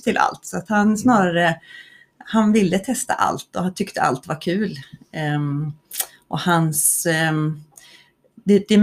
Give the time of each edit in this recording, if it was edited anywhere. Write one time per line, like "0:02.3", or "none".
none